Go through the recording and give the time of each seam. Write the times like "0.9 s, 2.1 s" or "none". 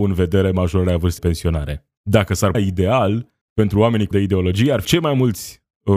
1.2 s, 2.0 s, 2.5 s, 3.4 s, 4.1 s, 4.8 s